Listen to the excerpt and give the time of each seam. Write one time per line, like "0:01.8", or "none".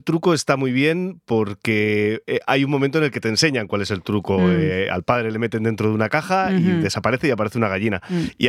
none